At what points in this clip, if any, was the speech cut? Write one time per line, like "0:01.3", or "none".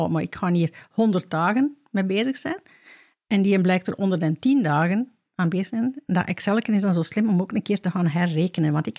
none